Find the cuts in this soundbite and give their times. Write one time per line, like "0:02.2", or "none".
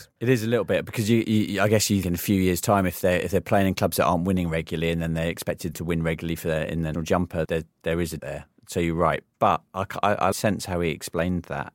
0:02.0
0:05.7
0:06.9
0:07.4
0:08.2
0:09.7
0:10.3

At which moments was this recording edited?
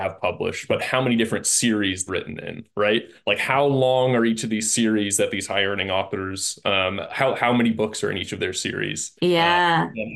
0:02.1
0:09.2

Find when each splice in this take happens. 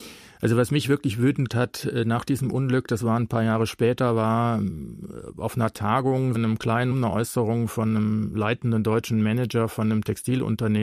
0:01.5
0:06.3
0:06.9

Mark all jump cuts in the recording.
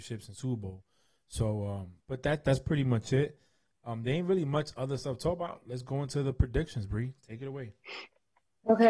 0:02.0

